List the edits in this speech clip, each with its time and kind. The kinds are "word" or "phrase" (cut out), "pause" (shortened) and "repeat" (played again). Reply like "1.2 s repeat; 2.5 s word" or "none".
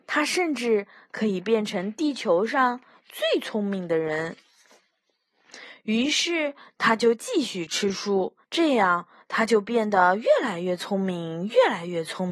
8.4 s pause

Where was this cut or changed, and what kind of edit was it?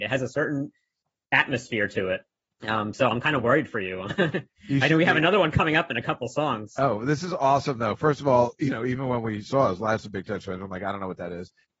none

